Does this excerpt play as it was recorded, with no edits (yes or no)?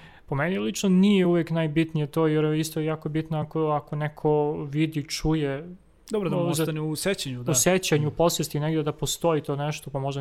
yes